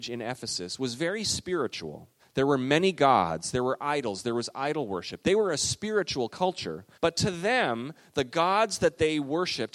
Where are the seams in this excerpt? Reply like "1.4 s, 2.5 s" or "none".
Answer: 2.2 s, 6.9 s